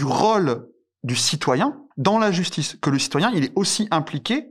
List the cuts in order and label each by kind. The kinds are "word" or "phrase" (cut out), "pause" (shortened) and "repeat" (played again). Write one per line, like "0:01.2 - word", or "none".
0:01.9 - pause

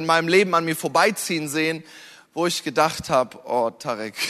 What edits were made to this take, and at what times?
none

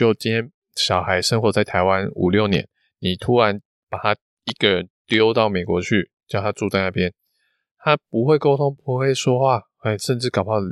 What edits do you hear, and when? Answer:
none

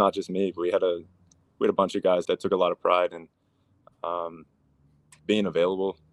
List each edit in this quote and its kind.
0:02.2 - word

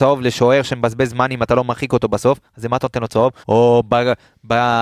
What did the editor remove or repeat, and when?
0:03.4 - pause

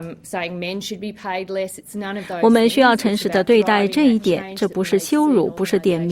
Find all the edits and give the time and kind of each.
none

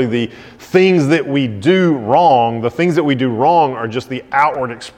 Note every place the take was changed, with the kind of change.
none

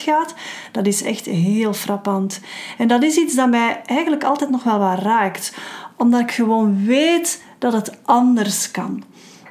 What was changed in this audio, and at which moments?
none

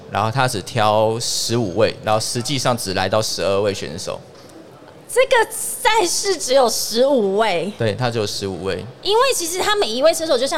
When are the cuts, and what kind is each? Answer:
0:09.0 - pause

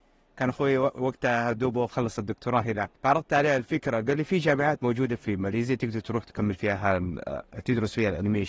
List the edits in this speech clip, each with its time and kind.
0:02.9 - pause

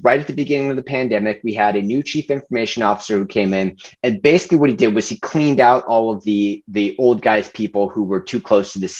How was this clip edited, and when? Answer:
none

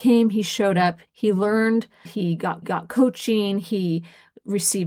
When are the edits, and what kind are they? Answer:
0:01.1 - pause
0:02.1 - phrase
0:02.6 - repeat

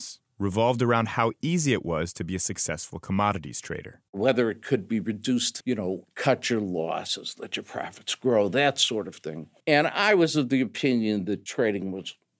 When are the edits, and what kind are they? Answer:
0:04.1 - pause
0:05.6 - phrase
0:09.6 - pause

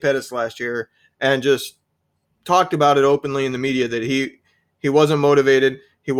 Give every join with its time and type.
none

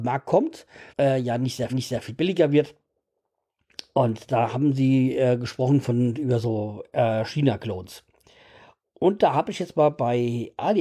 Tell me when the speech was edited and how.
0:00.9 - pause
0:01.7 - repeat

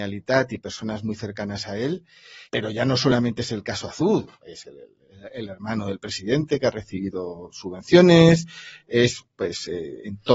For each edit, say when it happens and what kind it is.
0:02.5 - pause

